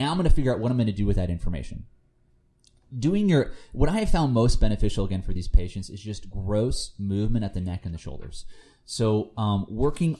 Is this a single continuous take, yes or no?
yes